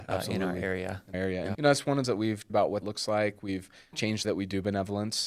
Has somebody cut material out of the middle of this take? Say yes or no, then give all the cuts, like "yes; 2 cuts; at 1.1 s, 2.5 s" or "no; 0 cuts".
yes; 7 cuts; at 1.1 s, 1.5 s, 2.0 s, 2.5 s, 2.8 s, 3.9 s, 4.2 s